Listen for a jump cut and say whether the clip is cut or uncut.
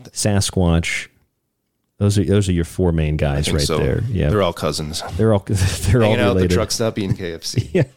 uncut